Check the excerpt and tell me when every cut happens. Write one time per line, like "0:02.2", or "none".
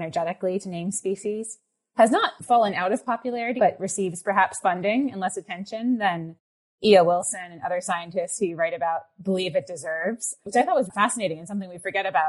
0:03.6
0:04.6
0:10.9